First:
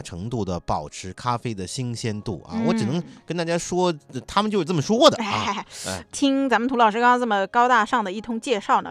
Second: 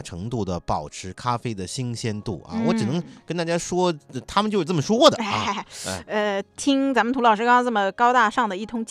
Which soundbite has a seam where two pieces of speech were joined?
first; 1 cut; at 6.0 s

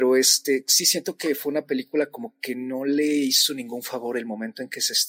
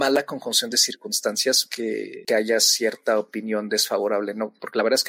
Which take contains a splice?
second; 2 cuts; at 1.7 s, 2.3 s

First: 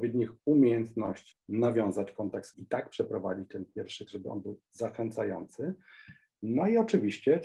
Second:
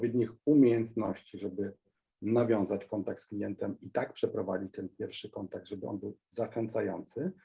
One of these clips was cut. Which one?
first; 3 cuts; at 1.3 s, 2.5 s, 4.1 s

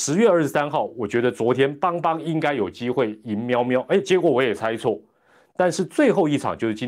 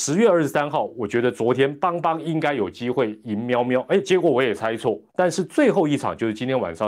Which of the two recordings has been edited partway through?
second; 1 cut; at 5.1 s

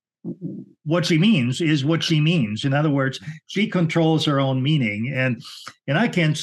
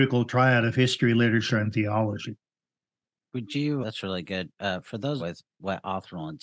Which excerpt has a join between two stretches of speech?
second; 2 cuts; at 3.8 s, 5.2 s

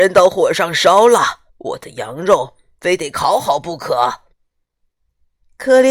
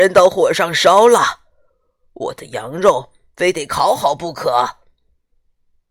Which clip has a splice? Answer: first; 2 cuts; at 1.5 s, 4.3 s

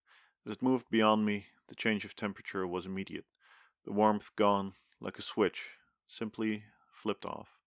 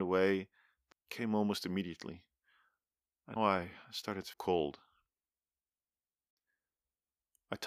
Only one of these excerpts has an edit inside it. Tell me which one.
second; 3 cuts; at 0.9 s, 3.4 s, 4.3 s

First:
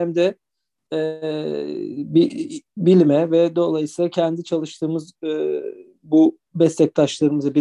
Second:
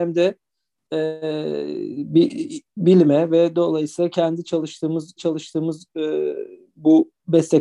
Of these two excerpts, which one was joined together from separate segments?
second; 1 cut; at 5.2 s

